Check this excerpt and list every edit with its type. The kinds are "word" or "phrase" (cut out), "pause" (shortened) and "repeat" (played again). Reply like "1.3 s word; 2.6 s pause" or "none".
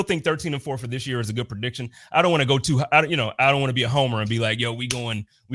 none